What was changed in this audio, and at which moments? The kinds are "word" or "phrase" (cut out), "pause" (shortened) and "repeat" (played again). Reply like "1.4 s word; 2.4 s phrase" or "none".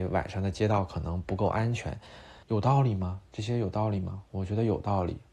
2.4 s pause